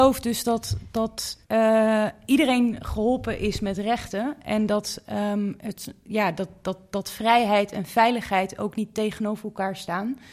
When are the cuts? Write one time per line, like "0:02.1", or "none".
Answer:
0:01.4